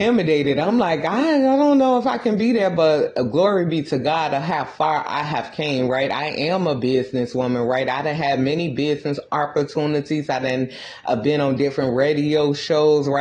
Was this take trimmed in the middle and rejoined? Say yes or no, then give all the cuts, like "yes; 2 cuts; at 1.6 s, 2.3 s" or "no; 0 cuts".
no; 0 cuts